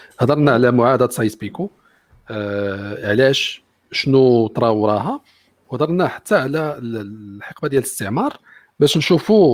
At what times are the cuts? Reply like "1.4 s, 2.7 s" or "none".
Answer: none